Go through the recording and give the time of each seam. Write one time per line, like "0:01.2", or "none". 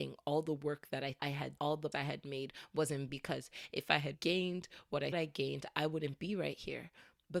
0:01.2
0:01.6
0:01.9
0:03.1
0:04.1
0:05.1